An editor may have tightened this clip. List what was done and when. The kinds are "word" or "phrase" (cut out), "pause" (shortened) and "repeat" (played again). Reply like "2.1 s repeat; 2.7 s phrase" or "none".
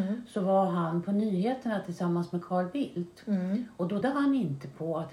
4.0 s word